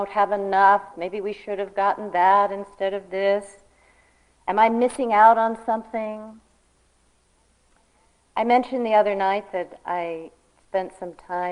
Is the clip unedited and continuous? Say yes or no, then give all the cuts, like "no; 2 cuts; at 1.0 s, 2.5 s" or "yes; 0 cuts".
yes; 0 cuts